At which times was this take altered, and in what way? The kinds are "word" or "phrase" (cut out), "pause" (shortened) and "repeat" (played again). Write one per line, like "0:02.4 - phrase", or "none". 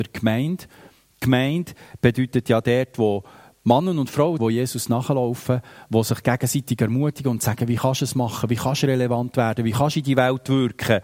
0:04.4 - word